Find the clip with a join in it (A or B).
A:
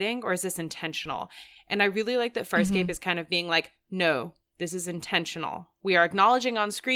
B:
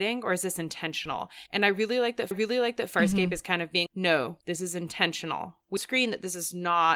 B